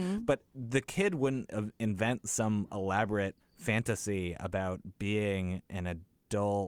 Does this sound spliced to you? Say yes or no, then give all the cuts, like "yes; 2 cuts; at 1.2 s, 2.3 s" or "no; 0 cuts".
yes; 1 cut; at 3.4 s